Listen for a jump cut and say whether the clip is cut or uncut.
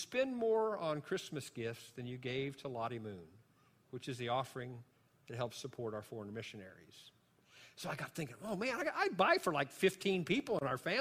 uncut